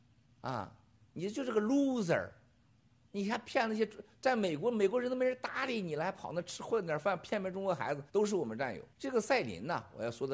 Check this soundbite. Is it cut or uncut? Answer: cut